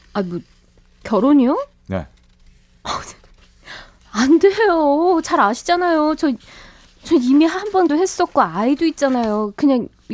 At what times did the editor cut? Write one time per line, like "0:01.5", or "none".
0:07.9

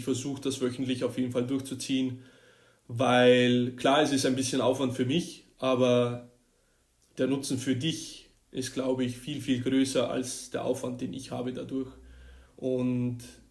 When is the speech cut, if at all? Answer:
0:08.4

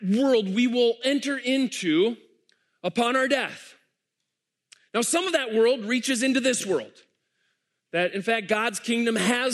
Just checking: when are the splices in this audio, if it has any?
0:01.0

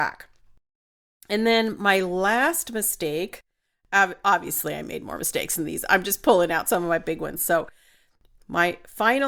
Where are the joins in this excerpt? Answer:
none

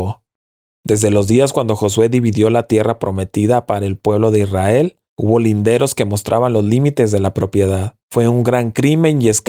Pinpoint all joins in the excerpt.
0:05.0
0:08.0

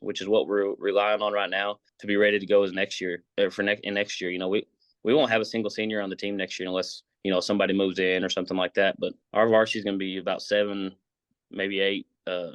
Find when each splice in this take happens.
0:01.9
0:09.2

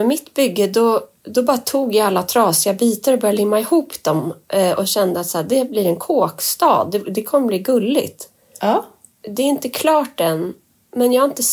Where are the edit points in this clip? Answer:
none

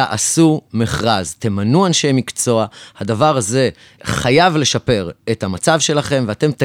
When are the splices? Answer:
0:04.0

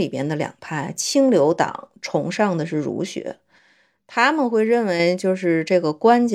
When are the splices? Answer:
none

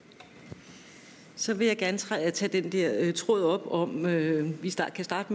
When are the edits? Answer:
none

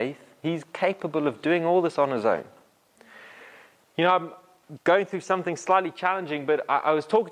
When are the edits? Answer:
none

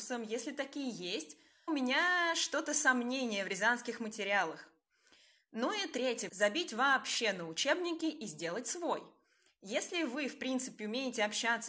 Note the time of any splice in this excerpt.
0:01.7
0:06.3

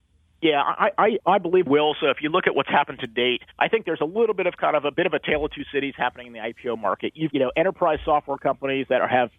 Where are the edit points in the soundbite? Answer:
0:01.2
0:01.7
0:03.5
0:07.3

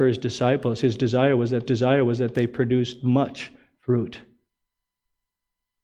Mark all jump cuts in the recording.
0:01.7

